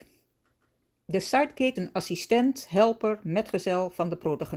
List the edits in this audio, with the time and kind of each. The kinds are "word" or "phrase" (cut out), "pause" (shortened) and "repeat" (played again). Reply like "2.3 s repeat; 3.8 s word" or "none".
1.8 s word